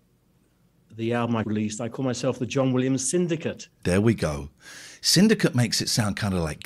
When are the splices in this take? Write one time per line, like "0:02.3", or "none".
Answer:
0:01.4